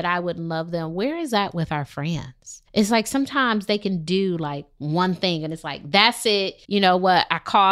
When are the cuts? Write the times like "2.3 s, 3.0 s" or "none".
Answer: 2.7 s, 6.6 s